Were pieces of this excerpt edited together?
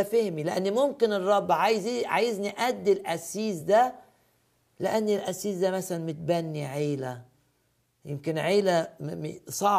no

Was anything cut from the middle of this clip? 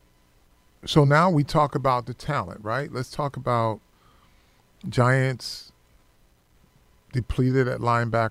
no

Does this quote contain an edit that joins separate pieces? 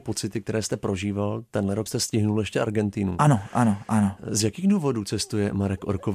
yes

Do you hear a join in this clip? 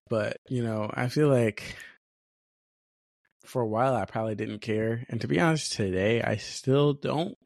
no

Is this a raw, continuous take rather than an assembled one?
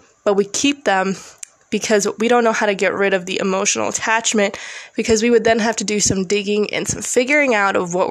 yes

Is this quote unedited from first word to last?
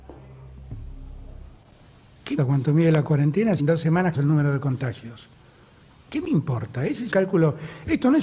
no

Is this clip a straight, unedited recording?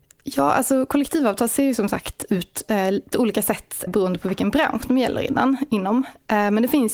no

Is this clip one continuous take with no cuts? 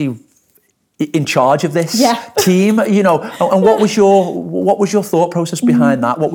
yes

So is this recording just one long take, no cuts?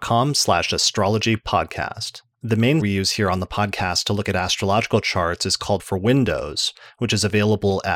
no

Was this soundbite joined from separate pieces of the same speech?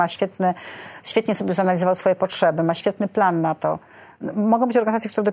no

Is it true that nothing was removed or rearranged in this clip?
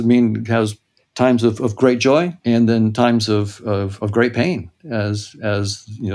no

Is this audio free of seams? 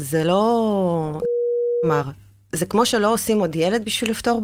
yes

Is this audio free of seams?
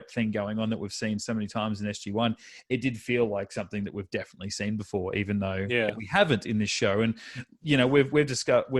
yes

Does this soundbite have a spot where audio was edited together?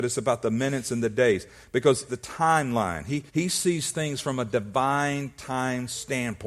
yes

